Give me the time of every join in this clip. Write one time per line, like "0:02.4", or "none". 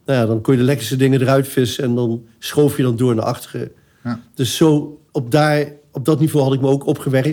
0:05.1

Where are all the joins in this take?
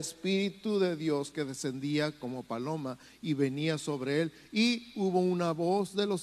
none

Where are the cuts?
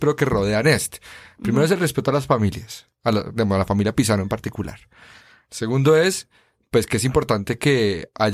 none

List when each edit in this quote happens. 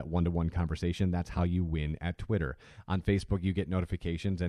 none

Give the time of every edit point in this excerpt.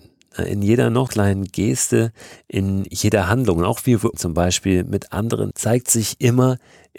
0:01.1
0:04.1
0:05.5

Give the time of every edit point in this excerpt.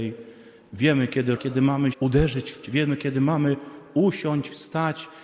0:01.4
0:01.9
0:02.6

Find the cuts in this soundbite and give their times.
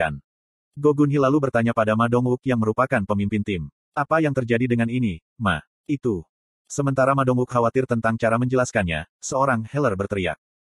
none

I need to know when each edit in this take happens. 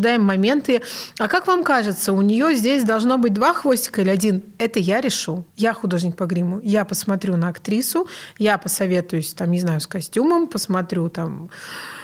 0:05.5

